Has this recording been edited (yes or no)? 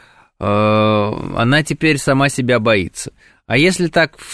no